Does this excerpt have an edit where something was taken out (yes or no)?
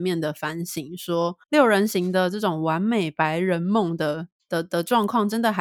yes